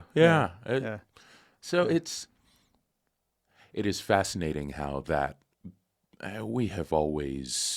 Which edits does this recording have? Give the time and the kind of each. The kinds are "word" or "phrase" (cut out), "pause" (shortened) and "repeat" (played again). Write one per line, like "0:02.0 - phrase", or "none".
none